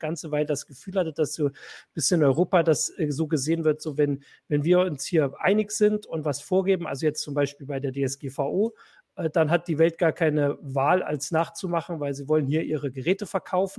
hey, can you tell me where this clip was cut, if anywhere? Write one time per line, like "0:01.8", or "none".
none